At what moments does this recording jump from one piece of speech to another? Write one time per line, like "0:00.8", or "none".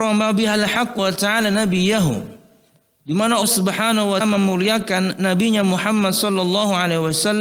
0:01.0
0:03.4
0:04.2